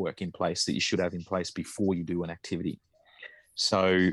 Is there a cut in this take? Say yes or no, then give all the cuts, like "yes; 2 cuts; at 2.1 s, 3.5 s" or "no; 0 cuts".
no; 0 cuts